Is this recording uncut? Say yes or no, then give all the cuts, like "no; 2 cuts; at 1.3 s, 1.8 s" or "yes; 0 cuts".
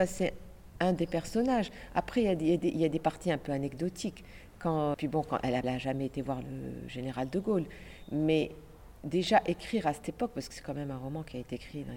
no; 2 cuts; at 4.9 s, 5.6 s